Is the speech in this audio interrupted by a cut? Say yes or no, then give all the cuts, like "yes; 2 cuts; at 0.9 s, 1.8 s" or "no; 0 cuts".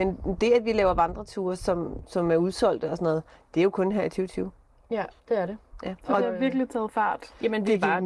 yes; 1 cut; at 5.2 s